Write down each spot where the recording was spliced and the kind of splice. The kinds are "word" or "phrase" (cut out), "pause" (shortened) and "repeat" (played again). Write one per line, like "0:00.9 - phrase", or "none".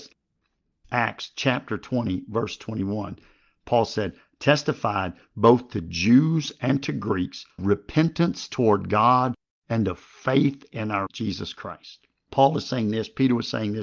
0:07.6 - word
0:11.1 - word